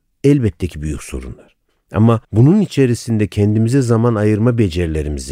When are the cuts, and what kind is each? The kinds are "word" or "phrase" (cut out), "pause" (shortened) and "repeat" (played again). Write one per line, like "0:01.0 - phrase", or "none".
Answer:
0:02.2 - pause